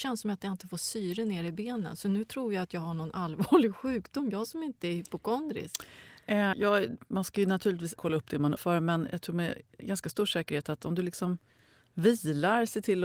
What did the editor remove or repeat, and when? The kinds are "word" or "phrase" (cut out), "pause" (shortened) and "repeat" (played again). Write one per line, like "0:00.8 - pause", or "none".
0:06.5 - word
0:08.0 - word
0:08.6 - word